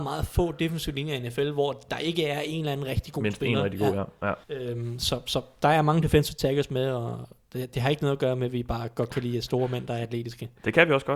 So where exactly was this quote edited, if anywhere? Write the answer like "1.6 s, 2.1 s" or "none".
4.4 s